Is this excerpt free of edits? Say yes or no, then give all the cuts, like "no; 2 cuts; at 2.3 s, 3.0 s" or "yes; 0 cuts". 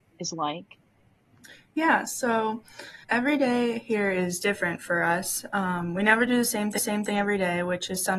no; 2 cuts; at 3.0 s, 6.8 s